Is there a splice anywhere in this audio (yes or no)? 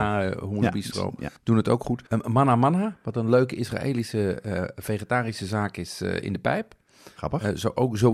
yes